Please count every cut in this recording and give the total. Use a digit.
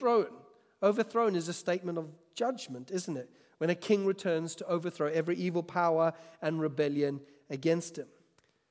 0